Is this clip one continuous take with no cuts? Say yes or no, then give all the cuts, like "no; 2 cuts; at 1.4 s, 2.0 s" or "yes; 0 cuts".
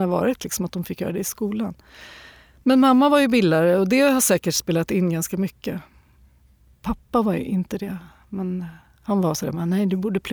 yes; 0 cuts